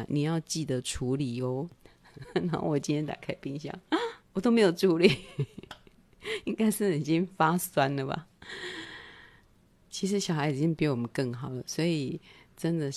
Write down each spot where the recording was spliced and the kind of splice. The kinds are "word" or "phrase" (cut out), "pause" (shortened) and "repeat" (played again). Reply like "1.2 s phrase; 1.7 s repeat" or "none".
1.8 s pause; 4.2 s pause